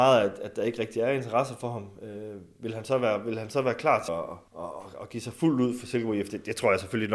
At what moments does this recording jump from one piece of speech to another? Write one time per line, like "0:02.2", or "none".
0:04.1
0:04.5

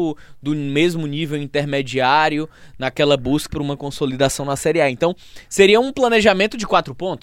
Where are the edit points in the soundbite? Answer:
0:03.5

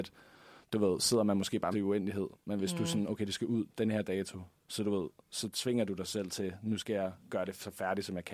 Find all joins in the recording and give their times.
0:01.7

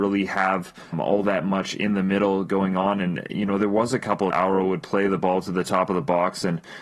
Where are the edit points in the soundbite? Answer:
0:00.9
0:04.3

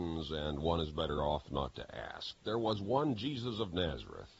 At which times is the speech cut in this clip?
none

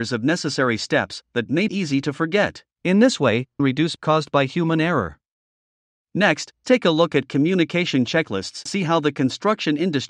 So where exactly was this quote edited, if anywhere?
0:01.7
0:02.7
0:03.6
0:04.0
0:06.6
0:08.7

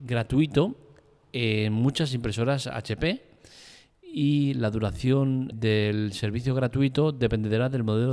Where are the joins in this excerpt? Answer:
0:05.5

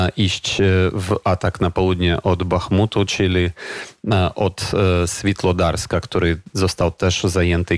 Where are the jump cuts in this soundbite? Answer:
none

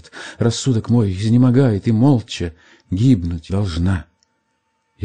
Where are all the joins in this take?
0:03.5

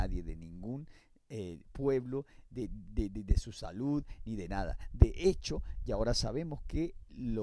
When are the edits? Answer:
none

